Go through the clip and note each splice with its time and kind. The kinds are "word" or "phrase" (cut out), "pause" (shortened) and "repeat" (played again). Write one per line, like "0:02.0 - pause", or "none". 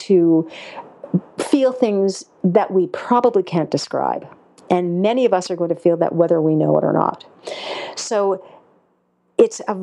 none